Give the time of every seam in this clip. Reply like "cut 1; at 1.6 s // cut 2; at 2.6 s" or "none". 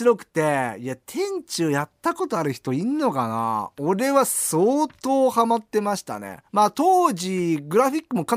cut 1; at 6.5 s